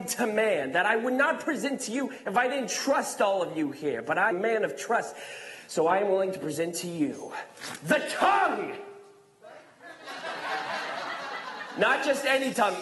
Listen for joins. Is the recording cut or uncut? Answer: cut